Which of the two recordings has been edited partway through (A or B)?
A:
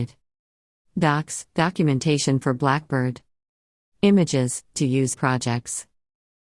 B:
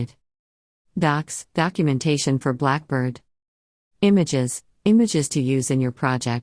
A